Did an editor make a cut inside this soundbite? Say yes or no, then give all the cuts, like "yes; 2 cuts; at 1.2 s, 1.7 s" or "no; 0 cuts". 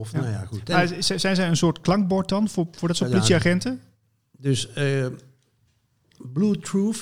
no; 0 cuts